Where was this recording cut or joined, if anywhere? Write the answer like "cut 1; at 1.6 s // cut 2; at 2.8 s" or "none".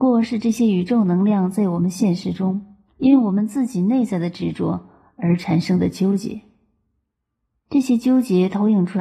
cut 1; at 2.9 s